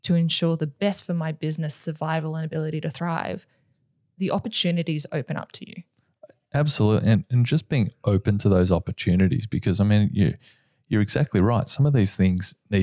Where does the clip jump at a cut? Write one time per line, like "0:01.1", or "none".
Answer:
none